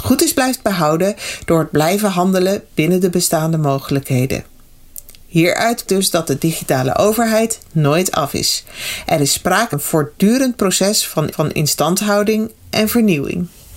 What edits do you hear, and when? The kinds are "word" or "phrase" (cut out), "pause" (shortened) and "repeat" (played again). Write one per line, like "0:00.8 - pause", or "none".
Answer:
0:05.9 - word
0:09.7 - word
0:11.3 - repeat